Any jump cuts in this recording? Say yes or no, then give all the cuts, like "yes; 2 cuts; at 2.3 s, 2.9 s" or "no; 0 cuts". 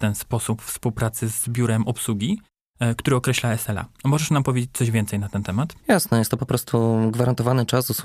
yes; 1 cut; at 5.8 s